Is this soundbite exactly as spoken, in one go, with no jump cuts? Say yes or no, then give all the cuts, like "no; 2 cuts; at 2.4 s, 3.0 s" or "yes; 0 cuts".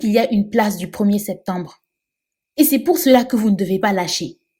yes; 0 cuts